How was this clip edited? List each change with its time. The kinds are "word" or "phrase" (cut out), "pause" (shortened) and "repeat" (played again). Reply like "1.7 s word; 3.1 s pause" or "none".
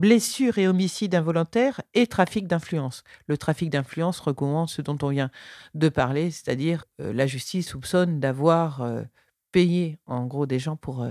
6.8 s word; 7.7 s word